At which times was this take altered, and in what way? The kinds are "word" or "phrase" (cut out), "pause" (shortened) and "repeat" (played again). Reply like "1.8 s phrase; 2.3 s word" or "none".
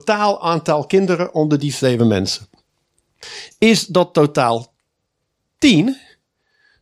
none